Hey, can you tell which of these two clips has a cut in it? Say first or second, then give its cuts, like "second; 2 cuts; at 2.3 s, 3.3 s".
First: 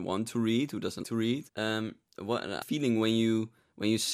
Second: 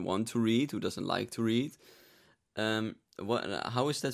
first; 3 cuts; at 1.0 s, 1.5 s, 2.6 s